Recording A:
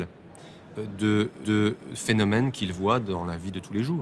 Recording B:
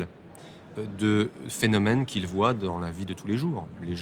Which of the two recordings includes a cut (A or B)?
A